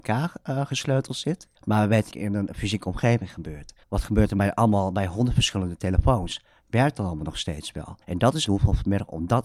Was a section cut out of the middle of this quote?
yes; 5 cuts; at 1.6 s, 2.1 s, 3.8 s, 8.0 s, 8.5 s

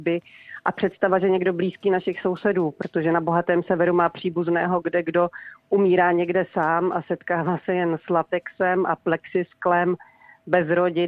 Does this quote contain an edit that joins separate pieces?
no; 0 cuts

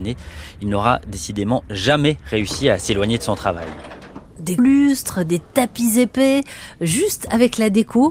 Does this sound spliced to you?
yes; 1 cut; at 4.6 s

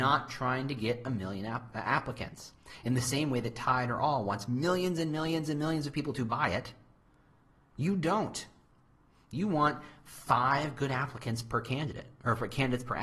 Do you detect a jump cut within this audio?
no; 0 cuts

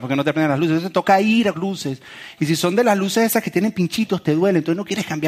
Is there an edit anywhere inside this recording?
yes; 1 cut; at 1.5 s

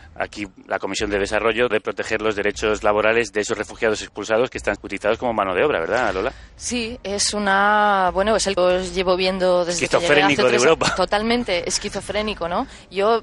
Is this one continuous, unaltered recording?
no; 3 cuts; at 1.7 s, 4.8 s, 8.6 s

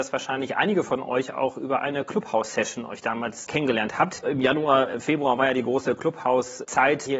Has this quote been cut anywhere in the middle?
no; 0 cuts

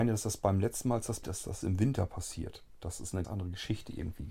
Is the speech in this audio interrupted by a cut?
yes; 3 cuts; at 1.2 s, 1.6 s, 3.2 s

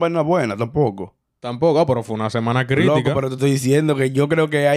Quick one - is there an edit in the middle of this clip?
no; 0 cuts

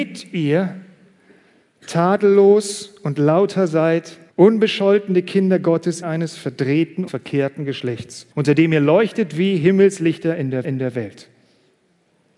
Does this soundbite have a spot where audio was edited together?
yes; 5 cuts; at 4.3 s, 6.0 s, 7.1 s, 8.3 s, 10.6 s

